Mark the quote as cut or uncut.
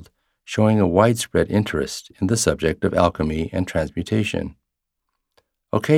uncut